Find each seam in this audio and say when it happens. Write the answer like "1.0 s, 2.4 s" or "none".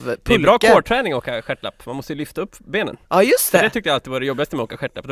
3.0 s